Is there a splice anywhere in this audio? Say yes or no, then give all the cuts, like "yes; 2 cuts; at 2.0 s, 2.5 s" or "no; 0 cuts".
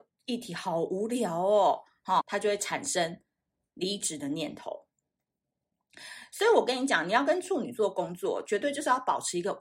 yes; 1 cut; at 2.2 s